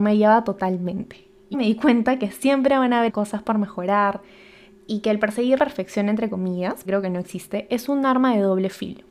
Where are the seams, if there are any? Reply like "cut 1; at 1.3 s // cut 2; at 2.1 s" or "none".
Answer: cut 1; at 1.5 s // cut 2; at 3.1 s // cut 3; at 5.6 s // cut 4; at 6.8 s